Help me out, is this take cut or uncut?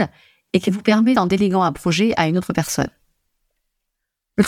cut